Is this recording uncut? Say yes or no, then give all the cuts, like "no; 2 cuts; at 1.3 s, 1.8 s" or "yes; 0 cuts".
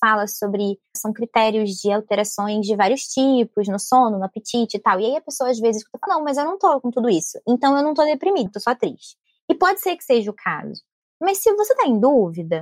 no; 3 cuts; at 0.9 s, 6.1 s, 8.5 s